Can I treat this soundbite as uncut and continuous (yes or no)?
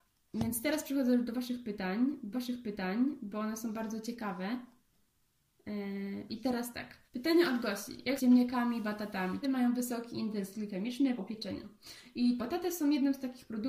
no